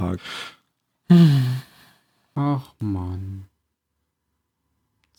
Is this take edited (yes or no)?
no